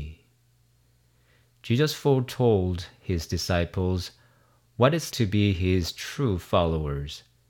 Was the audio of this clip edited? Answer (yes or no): yes